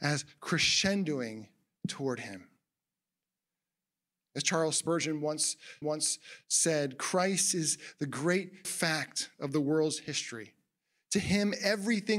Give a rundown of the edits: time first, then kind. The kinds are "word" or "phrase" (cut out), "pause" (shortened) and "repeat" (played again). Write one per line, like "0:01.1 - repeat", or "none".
0:05.8 - repeat
0:08.6 - word